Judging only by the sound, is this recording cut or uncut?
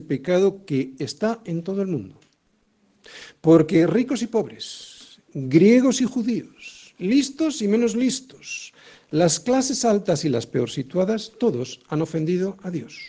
uncut